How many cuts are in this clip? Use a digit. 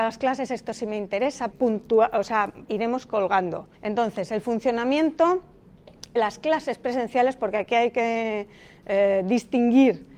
4